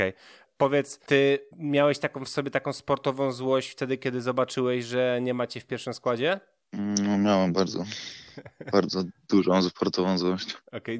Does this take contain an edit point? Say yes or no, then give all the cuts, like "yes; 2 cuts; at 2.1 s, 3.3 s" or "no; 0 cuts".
yes; 1 cut; at 1.5 s